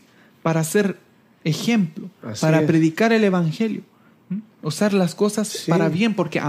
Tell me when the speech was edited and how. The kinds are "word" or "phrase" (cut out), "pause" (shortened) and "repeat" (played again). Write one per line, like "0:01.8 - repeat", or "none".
none

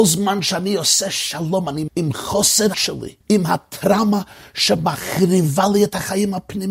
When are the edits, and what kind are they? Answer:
0:01.9 - word
0:02.7 - word
0:03.2 - pause

